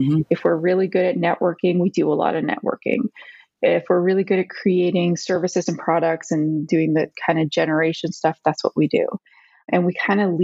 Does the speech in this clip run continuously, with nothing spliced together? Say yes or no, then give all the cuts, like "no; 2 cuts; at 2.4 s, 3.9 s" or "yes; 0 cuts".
yes; 0 cuts